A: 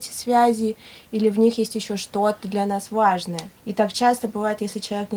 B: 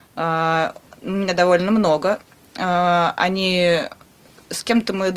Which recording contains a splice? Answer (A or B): A